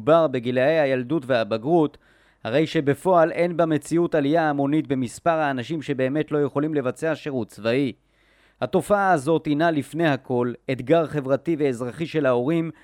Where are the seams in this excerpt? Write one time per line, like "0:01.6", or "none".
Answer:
none